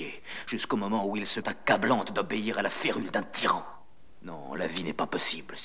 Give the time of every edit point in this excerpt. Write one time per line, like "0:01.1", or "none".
0:01.4